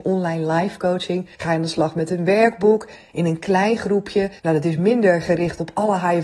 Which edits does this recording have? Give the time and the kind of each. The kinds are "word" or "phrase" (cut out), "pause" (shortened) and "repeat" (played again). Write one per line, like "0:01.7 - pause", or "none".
0:01.3 - pause
0:04.4 - pause